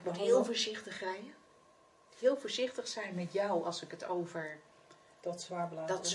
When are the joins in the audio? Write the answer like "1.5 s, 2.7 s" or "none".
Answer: none

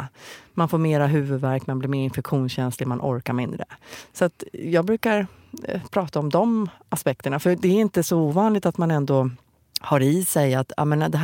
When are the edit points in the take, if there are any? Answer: none

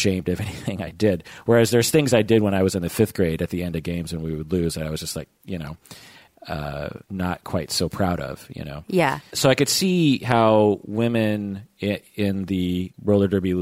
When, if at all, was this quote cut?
7.0 s, 12.1 s

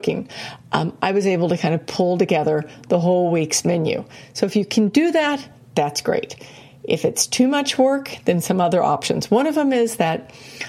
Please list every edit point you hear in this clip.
none

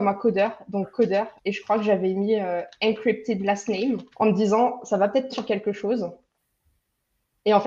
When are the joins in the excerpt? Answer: 1.4 s, 4.1 s, 5.3 s

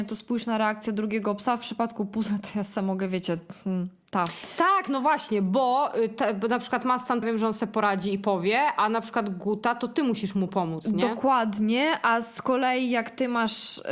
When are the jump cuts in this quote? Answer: 7.2 s

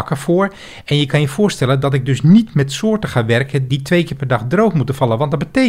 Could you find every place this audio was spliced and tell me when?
3.7 s

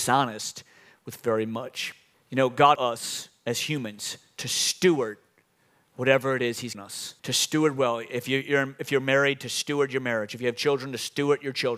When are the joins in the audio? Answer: 2.1 s, 2.7 s, 6.7 s, 7.2 s

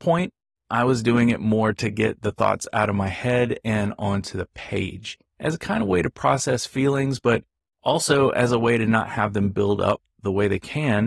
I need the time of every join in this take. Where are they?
none

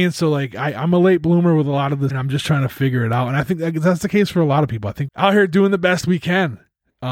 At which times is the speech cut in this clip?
2.1 s, 5.1 s

